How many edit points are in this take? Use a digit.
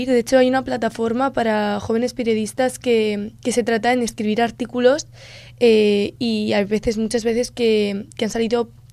0